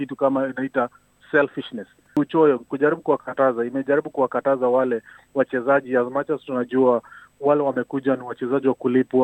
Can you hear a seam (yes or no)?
no